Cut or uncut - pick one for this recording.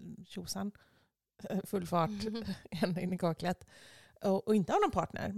uncut